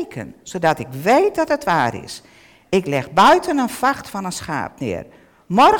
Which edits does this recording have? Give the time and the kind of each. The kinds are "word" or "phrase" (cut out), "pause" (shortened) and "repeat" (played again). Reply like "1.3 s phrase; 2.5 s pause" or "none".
none